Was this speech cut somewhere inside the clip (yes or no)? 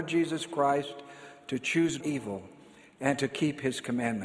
yes